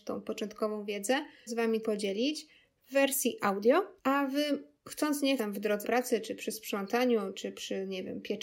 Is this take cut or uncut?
cut